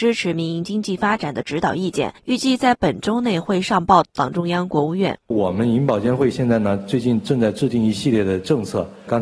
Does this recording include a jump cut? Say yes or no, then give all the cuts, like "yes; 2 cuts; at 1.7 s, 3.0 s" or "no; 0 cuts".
yes; 2 cuts; at 2.2 s, 5.2 s